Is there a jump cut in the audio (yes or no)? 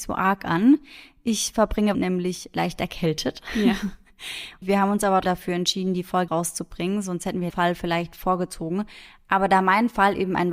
yes